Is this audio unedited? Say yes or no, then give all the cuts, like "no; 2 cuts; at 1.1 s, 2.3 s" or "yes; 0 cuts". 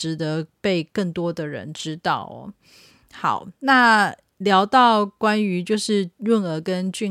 yes; 0 cuts